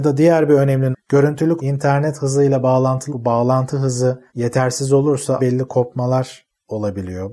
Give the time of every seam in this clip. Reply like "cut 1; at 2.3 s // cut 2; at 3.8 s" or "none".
cut 1; at 0.9 s // cut 2; at 1.6 s // cut 3; at 3.1 s // cut 4; at 4.3 s // cut 5; at 5.4 s